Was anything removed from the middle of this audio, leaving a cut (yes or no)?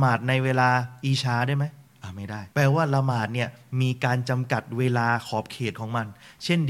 yes